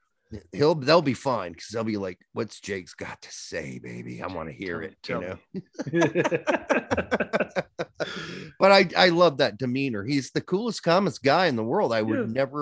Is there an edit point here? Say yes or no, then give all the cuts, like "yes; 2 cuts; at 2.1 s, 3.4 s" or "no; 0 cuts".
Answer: no; 0 cuts